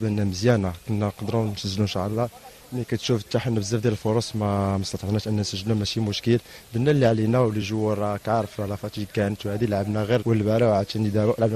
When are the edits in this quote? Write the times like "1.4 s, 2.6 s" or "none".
none